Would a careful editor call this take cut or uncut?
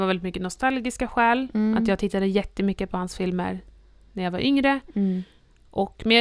uncut